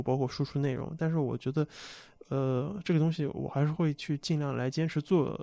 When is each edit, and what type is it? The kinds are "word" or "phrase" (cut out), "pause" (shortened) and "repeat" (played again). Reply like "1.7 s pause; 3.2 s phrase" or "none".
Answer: none

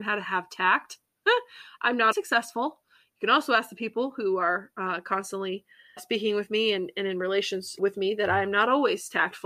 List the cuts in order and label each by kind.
2.1 s word; 6.0 s word; 7.8 s word

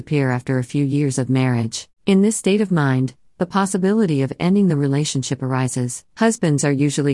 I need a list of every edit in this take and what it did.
2.0 s pause; 6.1 s pause

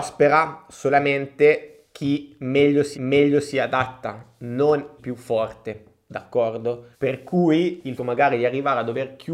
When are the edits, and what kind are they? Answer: 2.9 s repeat; 5.0 s word; 6.9 s pause; 8.0 s word

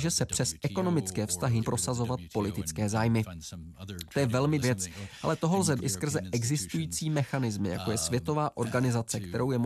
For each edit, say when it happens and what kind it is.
1.6 s word; 4.6 s word; 5.8 s word; 8.5 s word

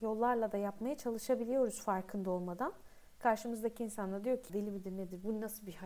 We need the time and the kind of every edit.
4.5 s word

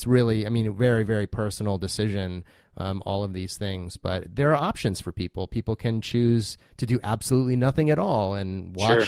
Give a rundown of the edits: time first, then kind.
none

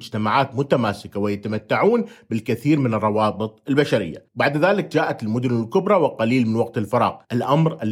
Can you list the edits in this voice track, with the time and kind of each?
none

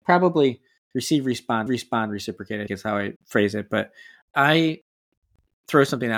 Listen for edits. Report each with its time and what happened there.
1.7 s repeat; 2.7 s word; 3.2 s pause; 4.3 s word

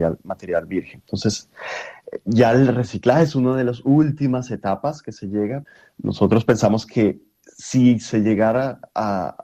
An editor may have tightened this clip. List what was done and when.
none

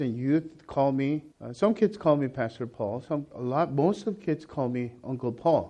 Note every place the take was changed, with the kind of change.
1.3 s pause

